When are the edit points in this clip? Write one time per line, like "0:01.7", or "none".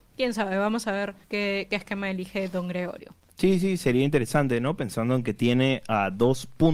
0:01.2